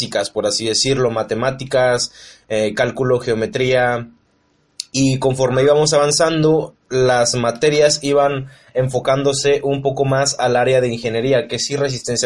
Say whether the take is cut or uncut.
uncut